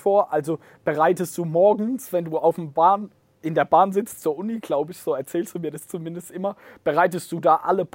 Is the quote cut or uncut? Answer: uncut